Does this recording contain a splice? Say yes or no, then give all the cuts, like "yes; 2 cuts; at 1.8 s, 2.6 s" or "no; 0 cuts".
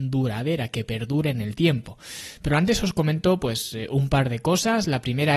no; 0 cuts